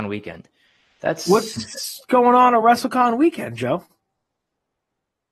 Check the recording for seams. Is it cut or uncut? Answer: uncut